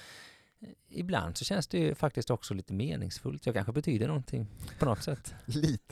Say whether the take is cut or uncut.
uncut